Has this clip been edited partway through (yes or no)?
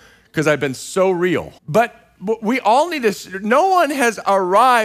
yes